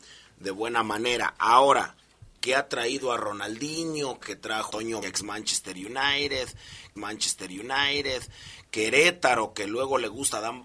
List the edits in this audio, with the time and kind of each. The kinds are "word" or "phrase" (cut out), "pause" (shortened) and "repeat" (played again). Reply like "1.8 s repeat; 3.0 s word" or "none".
2.4 s word; 4.2 s word; 4.7 s word; 5.0 s word; 7.0 s repeat